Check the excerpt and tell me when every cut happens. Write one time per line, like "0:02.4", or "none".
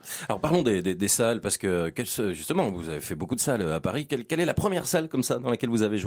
none